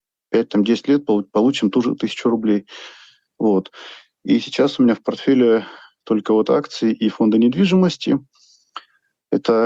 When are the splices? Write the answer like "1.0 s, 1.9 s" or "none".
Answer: none